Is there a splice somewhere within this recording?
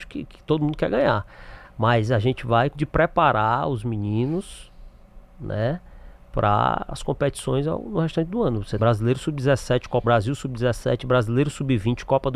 yes; 3 cuts; at 2.7 s, 8.8 s, 10.0 s

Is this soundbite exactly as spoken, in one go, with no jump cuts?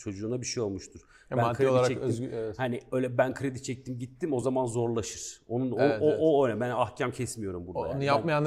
yes; 0 cuts

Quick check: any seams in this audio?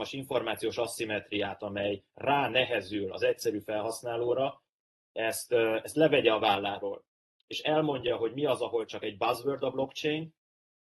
no; 0 cuts

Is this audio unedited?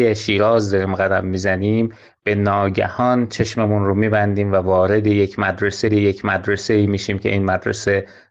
no; 1 cut; at 5.9 s

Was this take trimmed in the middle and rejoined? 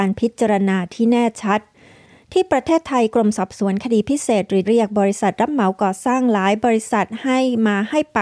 yes; 1 cut; at 4.6 s

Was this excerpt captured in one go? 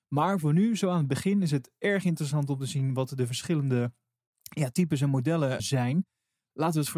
no; 1 cut; at 5.6 s

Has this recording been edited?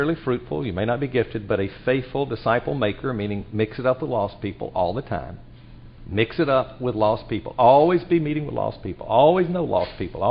no; 0 cuts

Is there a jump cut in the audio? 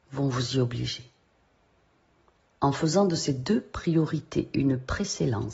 no; 0 cuts

